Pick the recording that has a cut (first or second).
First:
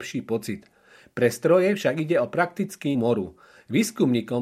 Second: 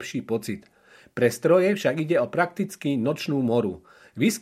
first